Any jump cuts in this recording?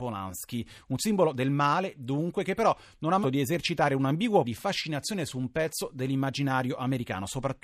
yes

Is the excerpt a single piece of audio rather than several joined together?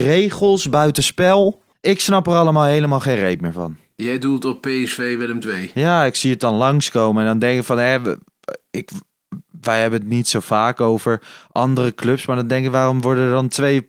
no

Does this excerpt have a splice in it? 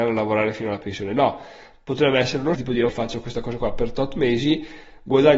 yes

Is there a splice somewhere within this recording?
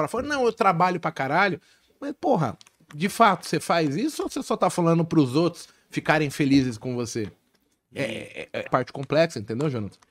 yes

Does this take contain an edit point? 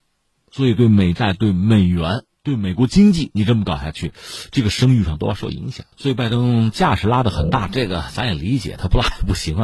yes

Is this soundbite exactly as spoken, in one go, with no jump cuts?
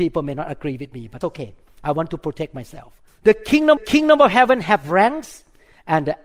no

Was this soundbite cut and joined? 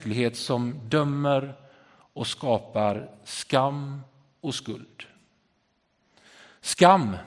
no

